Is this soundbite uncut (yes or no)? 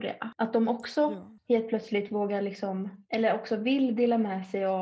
yes